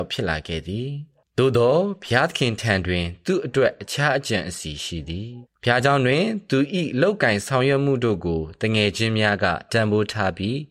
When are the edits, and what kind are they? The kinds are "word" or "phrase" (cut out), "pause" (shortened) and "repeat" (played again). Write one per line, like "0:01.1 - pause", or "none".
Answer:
0:01.2 - pause
0:05.5 - pause